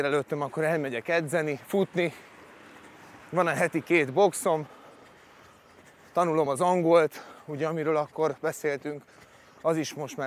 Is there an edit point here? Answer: no; 0 cuts

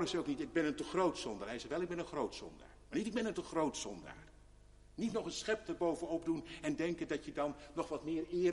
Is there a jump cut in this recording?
no; 0 cuts

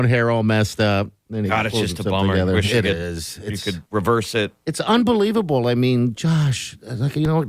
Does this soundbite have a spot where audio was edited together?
yes; 1 cut; at 3.9 s

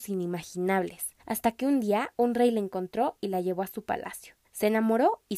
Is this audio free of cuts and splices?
no; 2 cuts; at 1.2 s, 4.4 s

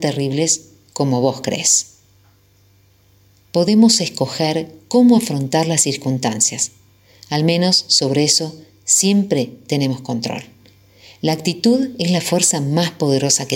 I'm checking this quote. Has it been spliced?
no; 0 cuts

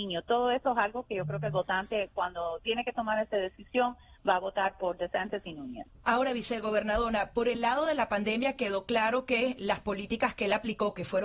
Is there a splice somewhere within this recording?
no; 0 cuts

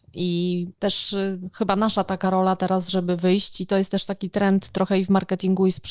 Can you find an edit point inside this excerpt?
no; 0 cuts

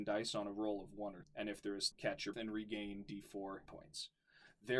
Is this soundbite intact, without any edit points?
no; 4 cuts; at 1.2 s, 1.9 s, 2.3 s, 3.7 s

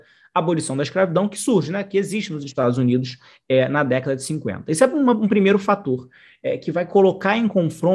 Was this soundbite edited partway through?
no; 0 cuts

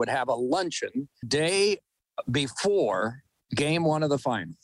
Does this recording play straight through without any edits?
no; 1 cut; at 1.2 s

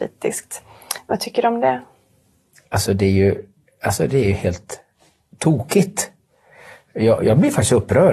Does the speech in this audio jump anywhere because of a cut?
no; 0 cuts

